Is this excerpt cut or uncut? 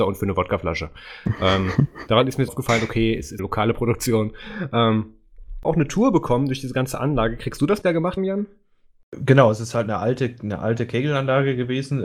cut